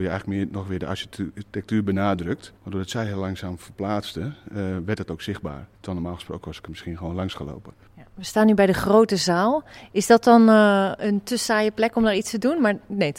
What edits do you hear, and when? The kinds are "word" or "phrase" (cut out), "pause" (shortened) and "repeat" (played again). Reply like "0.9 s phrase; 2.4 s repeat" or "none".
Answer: 2.6 s pause; 5.7 s pause

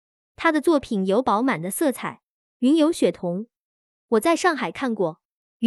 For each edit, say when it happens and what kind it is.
none

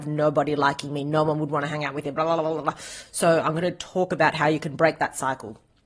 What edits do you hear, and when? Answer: none

